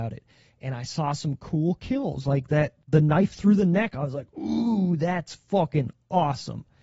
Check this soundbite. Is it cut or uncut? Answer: cut